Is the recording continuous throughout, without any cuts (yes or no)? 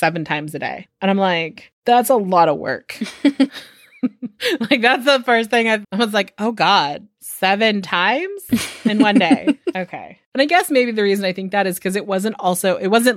no